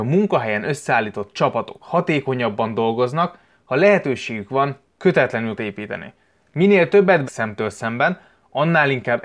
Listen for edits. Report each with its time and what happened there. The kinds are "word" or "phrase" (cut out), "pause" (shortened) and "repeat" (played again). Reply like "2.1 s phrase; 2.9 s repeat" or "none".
5.6 s word; 7.2 s word